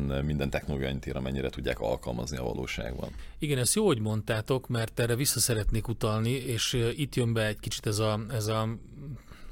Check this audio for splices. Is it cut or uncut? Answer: uncut